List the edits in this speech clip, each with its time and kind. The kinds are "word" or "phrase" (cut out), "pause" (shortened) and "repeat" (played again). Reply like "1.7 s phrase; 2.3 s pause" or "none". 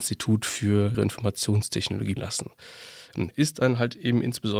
0.9 s word; 2.2 s word; 3.3 s word